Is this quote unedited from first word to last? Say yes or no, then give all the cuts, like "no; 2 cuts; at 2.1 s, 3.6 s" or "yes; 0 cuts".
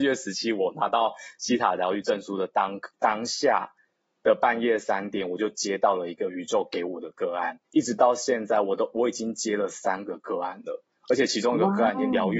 no; 1 cut; at 7.6 s